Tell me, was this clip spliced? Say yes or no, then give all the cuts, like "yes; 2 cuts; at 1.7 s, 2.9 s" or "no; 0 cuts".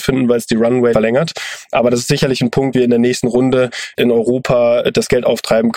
yes; 4 cuts; at 0.9 s, 2.7 s, 3.2 s, 3.9 s